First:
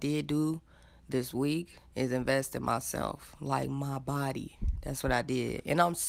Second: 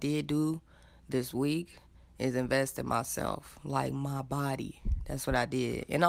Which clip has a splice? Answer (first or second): first